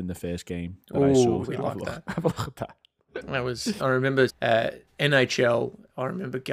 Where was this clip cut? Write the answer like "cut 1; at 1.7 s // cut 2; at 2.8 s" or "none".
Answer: cut 1; at 1.4 s // cut 2; at 3.8 s // cut 3; at 4.3 s // cut 4; at 4.9 s

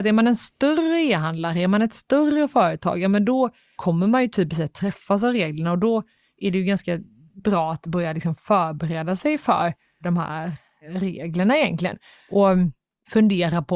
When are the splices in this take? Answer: none

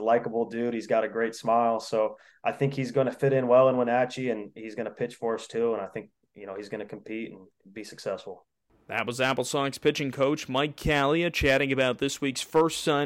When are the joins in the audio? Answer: none

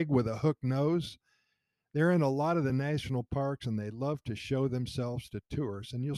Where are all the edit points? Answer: none

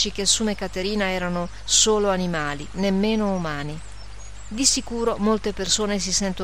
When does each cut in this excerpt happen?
cut 1; at 2.7 s

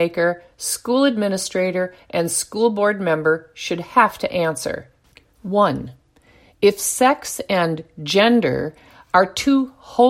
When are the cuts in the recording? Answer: none

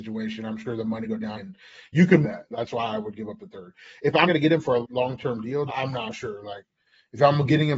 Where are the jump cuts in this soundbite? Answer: cut 1; at 1.0 s // cut 2; at 1.4 s // cut 3; at 2.2 s // cut 4; at 4.3 s // cut 5; at 4.8 s // cut 6; at 5.7 s

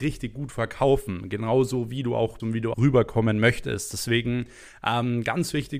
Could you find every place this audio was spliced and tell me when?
cut 1; at 2.4 s // cut 2; at 2.7 s

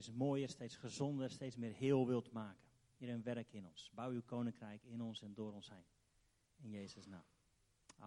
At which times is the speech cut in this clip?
none

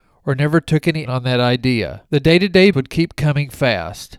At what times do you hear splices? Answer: cut 1; at 1.1 s // cut 2; at 2.1 s // cut 3; at 2.7 s

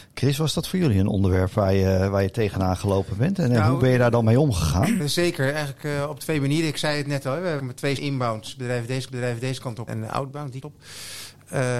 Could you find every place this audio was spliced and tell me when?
cut 1; at 5.0 s // cut 2; at 7.6 s // cut 3; at 8.0 s // cut 4; at 9.1 s // cut 5; at 9.9 s // cut 6; at 10.6 s

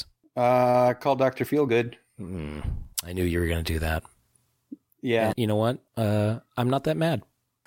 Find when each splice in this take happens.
cut 1; at 2.9 s // cut 2; at 5.3 s // cut 3; at 5.9 s

